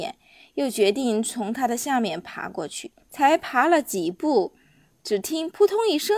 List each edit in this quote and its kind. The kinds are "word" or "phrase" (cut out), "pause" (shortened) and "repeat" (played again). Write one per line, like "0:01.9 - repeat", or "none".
0:03.0 - pause